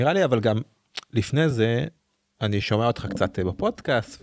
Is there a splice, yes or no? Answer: no